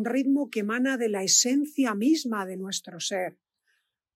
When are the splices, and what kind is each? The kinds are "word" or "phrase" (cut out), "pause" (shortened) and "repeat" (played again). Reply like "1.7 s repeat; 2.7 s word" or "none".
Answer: none